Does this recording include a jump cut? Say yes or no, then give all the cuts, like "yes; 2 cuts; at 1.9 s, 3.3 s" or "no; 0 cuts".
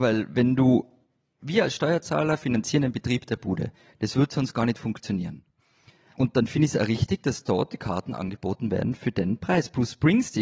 no; 0 cuts